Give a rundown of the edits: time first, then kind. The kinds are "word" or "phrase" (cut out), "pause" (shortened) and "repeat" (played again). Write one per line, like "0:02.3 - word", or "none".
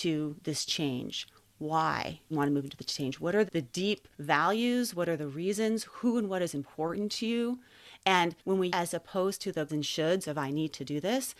0:02.3 - phrase
0:03.5 - word
0:04.1 - pause
0:08.4 - pause
0:08.7 - phrase
0:09.7 - phrase